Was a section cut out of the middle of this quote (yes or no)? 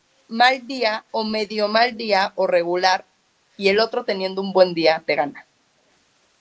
no